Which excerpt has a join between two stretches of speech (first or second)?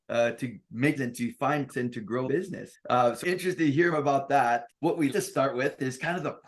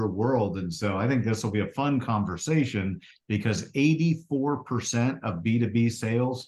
first